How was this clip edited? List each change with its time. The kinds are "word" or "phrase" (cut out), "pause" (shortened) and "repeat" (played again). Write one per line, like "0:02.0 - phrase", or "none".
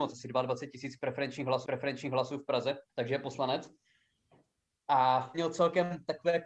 0:01.6 - repeat
0:02.9 - pause
0:05.3 - word